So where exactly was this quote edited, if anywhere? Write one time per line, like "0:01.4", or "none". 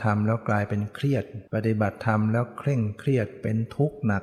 0:01.5